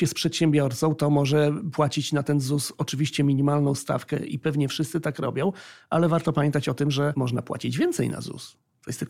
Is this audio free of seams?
yes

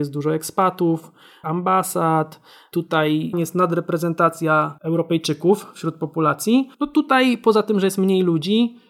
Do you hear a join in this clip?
yes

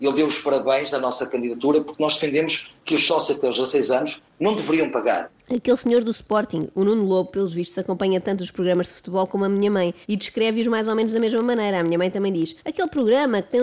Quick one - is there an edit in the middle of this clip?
yes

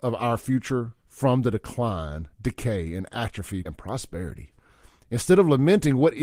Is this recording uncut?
no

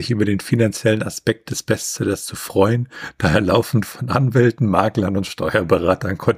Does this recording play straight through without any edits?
yes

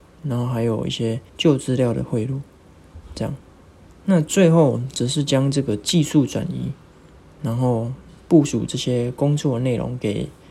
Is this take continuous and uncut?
no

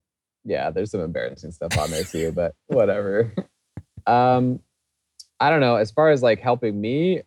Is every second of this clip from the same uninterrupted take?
no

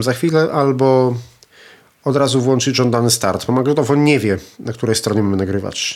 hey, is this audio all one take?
yes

